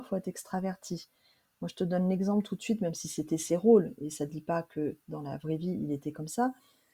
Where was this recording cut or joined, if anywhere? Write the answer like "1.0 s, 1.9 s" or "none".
none